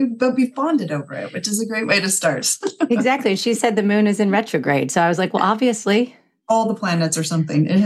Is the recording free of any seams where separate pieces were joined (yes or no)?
yes